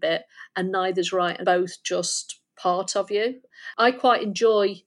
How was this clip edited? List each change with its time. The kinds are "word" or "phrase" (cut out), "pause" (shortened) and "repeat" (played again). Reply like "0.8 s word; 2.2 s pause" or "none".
1.4 s phrase